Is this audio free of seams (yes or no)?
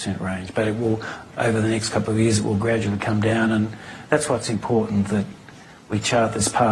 yes